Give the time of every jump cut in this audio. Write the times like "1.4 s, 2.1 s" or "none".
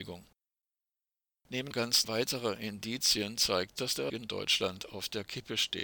1.7 s, 2.0 s, 3.8 s, 4.1 s